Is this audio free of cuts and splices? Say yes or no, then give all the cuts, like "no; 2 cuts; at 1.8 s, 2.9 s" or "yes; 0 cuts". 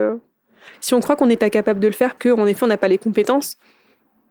no; 1 cut; at 2.2 s